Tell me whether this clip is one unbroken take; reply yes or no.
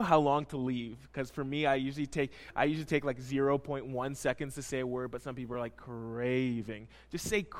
yes